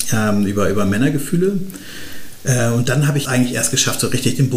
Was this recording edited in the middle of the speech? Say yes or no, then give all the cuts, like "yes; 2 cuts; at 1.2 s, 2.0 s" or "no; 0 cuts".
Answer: yes; 1 cut; at 3.2 s